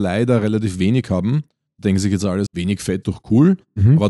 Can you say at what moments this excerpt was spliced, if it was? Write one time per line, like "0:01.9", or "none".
0:02.5
0:03.0